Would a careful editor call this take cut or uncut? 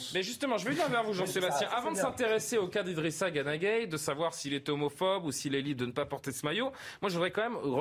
uncut